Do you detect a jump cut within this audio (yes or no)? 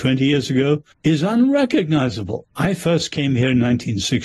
yes